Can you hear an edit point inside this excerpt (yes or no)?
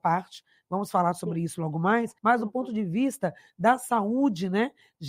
yes